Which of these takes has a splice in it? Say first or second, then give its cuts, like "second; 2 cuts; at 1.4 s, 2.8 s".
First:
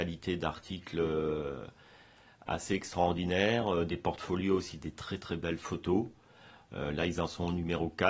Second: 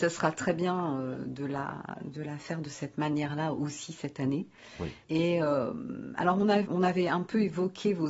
second; 2 cuts; at 5.0 s, 6.6 s